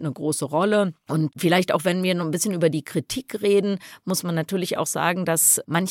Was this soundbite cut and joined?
no; 0 cuts

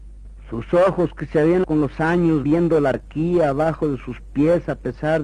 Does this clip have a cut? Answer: yes; 3 cuts; at 1.6 s, 2.4 s, 2.9 s

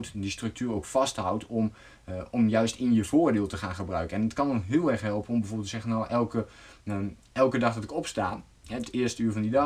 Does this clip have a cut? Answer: no; 0 cuts

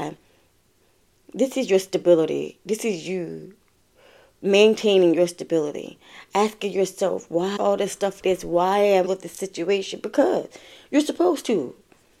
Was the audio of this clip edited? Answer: yes; 3 cuts; at 7.6 s, 8.2 s, 9.1 s

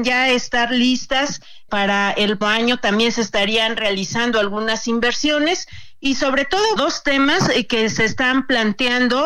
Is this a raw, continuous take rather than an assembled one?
no; 3 cuts; at 1.7 s, 2.4 s, 6.8 s

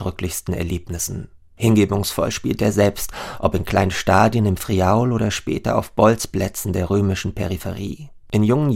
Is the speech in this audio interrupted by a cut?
no; 0 cuts

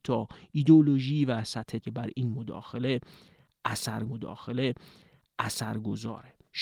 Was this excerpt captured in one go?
no; 2 cuts; at 1.8 s, 4.1 s

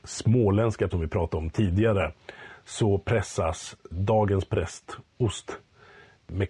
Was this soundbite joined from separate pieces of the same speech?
yes; 2 cuts; at 0.9 s, 3.8 s

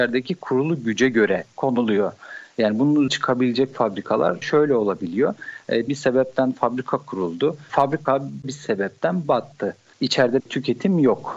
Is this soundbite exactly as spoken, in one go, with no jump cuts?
no; 6 cuts; at 1.5 s, 3.1 s, 4.4 s, 5.9 s, 8.4 s, 10.4 s

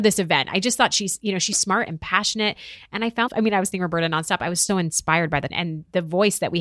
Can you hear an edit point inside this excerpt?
yes; 6 cuts; at 1.5 s, 1.9 s, 3.3 s, 3.7 s, 4.7 s, 5.5 s

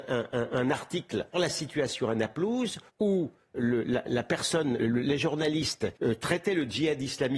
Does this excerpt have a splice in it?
yes; 5 cuts; at 1.3 s, 2.9 s, 4.1 s, 4.8 s, 6.0 s

